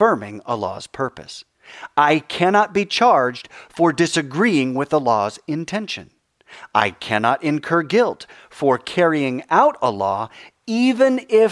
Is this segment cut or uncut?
uncut